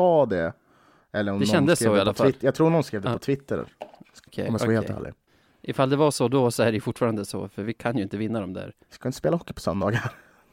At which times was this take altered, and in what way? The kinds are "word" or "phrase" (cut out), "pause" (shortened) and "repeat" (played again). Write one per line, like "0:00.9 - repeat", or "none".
0:04.3 - word
0:08.8 - pause